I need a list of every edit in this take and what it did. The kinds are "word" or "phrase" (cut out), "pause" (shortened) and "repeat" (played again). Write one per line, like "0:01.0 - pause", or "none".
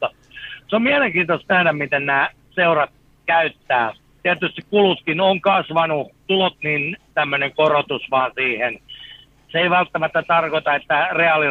0:04.0 - pause
0:06.2 - phrase
0:06.5 - phrase
0:07.1 - phrase